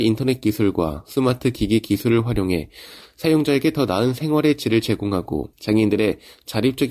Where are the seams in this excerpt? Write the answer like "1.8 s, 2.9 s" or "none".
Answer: 5.5 s